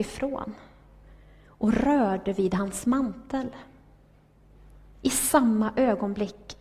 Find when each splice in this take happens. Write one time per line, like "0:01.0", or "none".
none